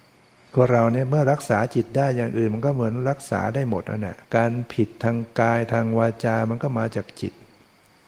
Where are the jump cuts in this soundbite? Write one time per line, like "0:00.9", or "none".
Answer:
0:04.2